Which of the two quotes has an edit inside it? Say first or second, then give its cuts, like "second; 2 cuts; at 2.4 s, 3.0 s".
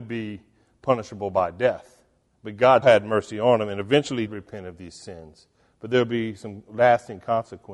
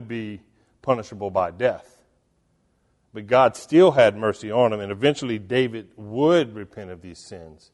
first; 3 cuts; at 2.3 s, 2.8 s, 4.3 s